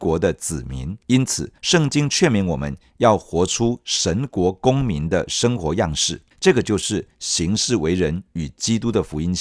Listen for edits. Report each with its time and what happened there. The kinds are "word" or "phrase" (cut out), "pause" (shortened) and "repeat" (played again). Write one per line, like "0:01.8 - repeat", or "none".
0:01.0 - pause
0:01.6 - pause
0:06.3 - pause